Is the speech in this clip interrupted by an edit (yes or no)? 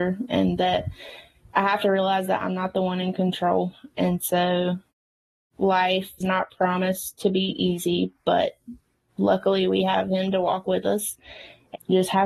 yes